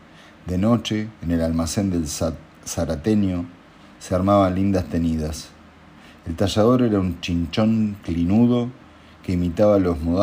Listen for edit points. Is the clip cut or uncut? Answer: uncut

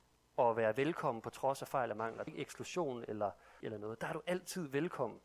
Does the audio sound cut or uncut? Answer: cut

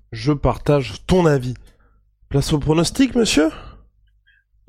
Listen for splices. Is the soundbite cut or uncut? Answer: uncut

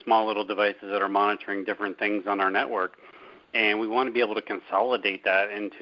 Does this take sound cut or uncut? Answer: uncut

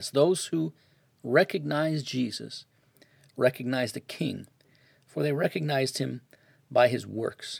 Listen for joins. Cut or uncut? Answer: uncut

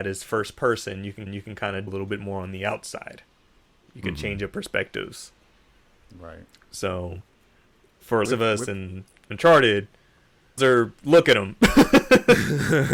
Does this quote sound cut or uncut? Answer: cut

